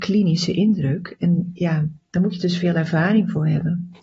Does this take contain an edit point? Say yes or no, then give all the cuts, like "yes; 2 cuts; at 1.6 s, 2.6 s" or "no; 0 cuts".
no; 0 cuts